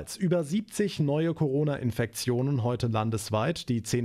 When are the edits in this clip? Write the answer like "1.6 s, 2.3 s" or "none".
none